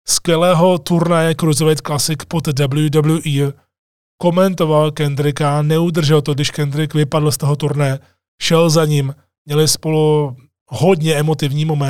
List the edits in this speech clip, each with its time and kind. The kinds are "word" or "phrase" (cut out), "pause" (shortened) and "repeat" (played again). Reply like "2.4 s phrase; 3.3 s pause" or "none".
none